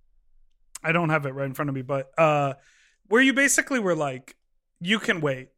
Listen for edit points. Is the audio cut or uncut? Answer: uncut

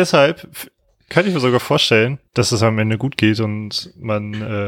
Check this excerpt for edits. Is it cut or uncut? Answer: cut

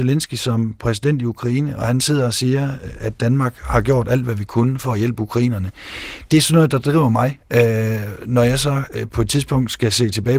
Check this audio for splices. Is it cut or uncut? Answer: uncut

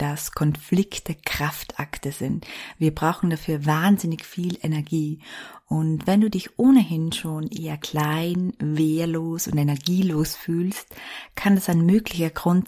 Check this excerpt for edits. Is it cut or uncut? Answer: uncut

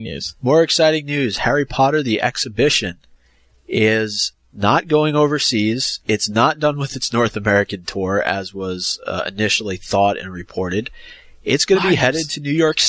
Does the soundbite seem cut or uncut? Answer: uncut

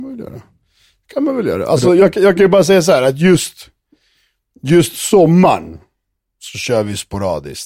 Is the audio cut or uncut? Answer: uncut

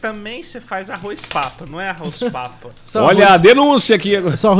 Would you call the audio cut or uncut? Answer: uncut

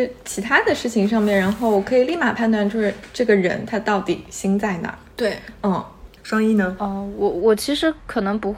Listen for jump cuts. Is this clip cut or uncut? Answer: cut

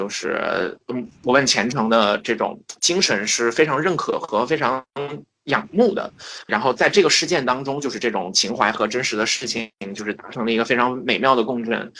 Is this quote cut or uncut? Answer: cut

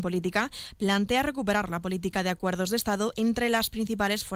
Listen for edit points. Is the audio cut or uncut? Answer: uncut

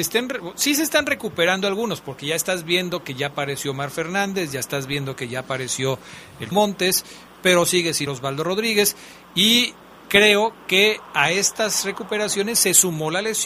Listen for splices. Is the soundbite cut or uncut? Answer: cut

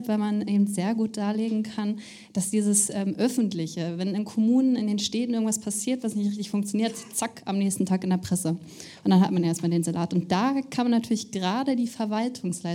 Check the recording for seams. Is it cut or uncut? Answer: uncut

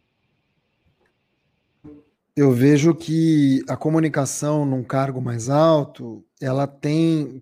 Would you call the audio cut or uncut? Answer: uncut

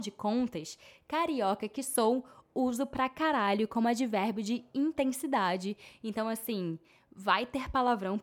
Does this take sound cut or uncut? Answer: uncut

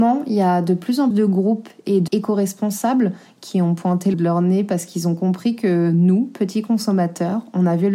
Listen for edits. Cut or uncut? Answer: cut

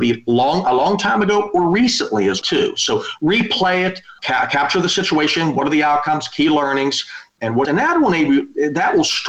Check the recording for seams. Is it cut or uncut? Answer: cut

